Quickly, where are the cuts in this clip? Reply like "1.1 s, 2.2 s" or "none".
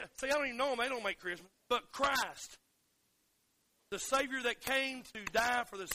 1.6 s